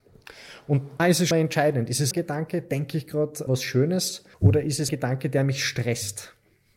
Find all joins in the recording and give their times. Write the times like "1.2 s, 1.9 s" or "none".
1.0 s, 1.3 s, 2.1 s, 3.5 s, 4.3 s, 4.9 s